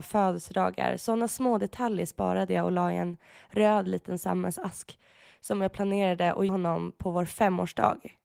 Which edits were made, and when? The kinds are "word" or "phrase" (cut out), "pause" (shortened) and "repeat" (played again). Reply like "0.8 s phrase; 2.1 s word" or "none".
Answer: 6.5 s word

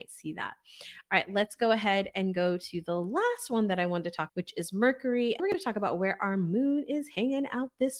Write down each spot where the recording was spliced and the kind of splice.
4.3 s word; 5.4 s word

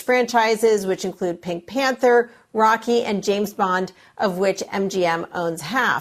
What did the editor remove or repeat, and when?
none

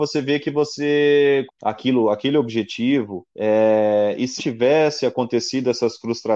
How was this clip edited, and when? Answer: 1.5 s phrase; 3.3 s pause; 4.4 s word

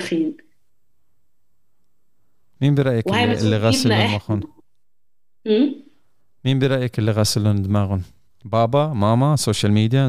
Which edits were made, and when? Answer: none

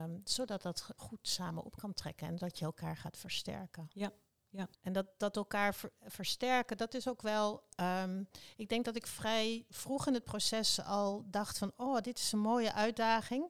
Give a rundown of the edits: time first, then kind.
1.0 s word; 4.7 s pause

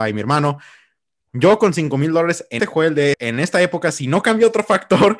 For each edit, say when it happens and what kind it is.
2.6 s word; 3.1 s word

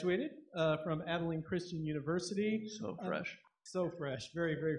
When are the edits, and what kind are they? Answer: none

